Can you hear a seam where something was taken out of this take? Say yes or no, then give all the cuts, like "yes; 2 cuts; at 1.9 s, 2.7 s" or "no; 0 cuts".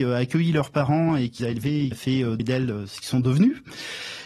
yes; 3 cuts; at 1.4 s, 1.9 s, 2.4 s